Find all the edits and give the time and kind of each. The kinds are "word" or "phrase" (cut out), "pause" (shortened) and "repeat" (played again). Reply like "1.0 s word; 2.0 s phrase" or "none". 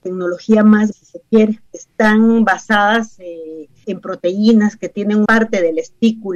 0.9 s word; 1.7 s pause; 3.8 s word; 5.2 s word